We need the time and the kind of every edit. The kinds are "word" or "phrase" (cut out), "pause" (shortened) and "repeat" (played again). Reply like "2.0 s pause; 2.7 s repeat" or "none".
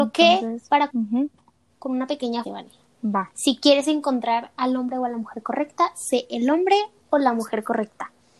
0.9 s word; 2.4 s word